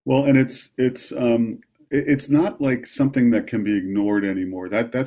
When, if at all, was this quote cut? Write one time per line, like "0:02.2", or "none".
none